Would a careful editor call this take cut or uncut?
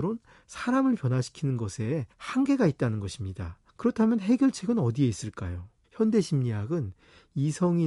cut